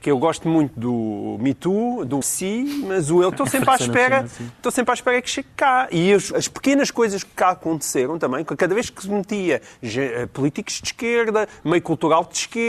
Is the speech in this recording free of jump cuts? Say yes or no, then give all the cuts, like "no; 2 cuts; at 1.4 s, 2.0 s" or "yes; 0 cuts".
no; 3 cuts; at 2.2 s, 3.3 s, 6.3 s